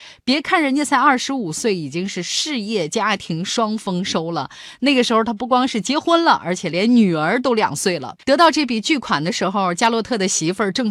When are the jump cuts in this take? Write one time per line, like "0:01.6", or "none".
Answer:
0:08.2